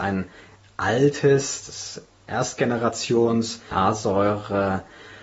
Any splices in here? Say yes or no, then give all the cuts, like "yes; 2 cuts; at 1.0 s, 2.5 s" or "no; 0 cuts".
yes; 1 cut; at 3.7 s